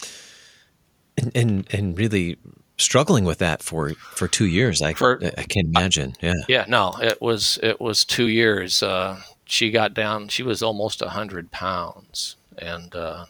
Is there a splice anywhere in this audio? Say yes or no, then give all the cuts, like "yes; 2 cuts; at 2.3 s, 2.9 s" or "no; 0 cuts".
no; 0 cuts